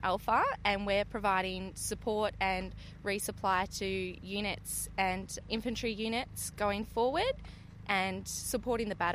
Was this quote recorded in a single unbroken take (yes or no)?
no